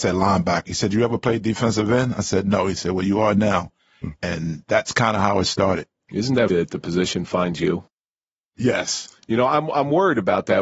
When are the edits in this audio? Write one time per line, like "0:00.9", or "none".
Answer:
0:06.5